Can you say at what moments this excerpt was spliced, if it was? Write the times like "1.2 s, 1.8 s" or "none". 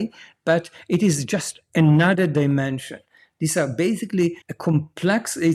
4.4 s